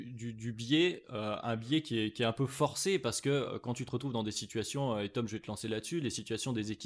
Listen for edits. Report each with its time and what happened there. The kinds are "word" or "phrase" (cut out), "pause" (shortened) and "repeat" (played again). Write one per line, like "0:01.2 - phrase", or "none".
none